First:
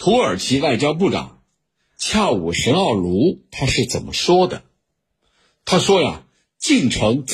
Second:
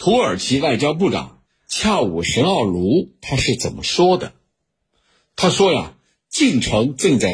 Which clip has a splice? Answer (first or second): second